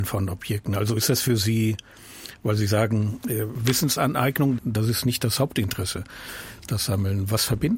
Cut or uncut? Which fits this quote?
cut